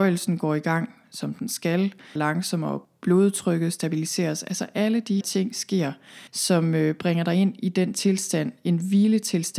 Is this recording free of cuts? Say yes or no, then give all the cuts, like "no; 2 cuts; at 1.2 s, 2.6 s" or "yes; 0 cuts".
no; 3 cuts; at 2.2 s, 5.2 s, 6.3 s